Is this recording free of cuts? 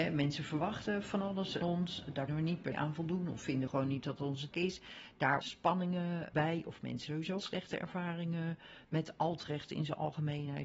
no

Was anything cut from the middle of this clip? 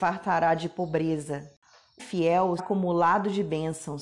yes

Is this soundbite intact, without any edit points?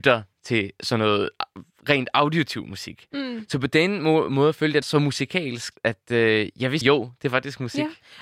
no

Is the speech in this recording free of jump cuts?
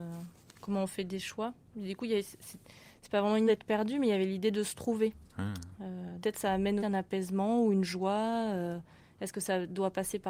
no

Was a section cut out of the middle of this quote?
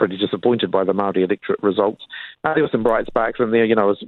no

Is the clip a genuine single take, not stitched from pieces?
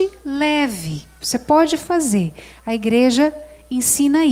yes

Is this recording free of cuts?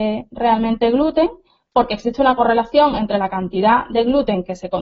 yes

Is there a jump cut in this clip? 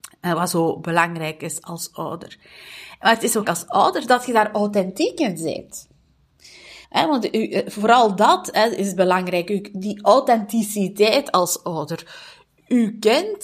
yes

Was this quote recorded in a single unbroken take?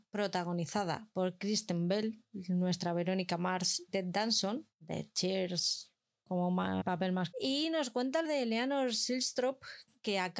no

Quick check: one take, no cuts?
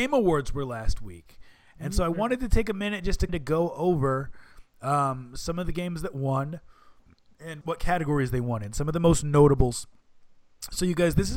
no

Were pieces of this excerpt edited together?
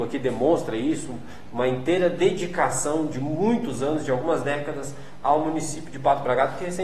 no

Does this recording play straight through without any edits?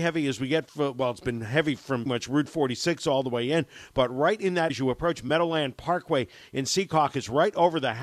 no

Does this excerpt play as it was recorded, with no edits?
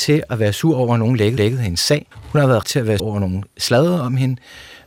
no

